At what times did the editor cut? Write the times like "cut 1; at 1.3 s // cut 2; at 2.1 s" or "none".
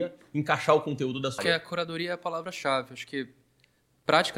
cut 1; at 1.4 s